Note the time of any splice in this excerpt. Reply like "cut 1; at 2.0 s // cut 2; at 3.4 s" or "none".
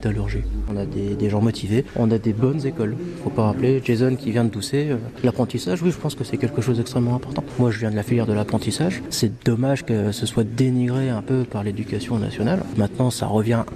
none